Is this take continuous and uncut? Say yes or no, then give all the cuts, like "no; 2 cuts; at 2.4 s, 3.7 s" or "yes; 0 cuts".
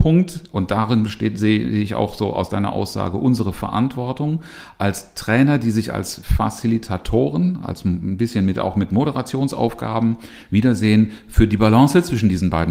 yes; 0 cuts